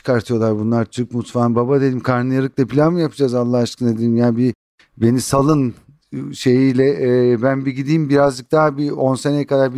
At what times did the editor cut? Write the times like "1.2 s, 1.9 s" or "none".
none